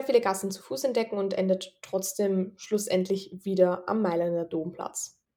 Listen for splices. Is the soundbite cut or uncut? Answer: uncut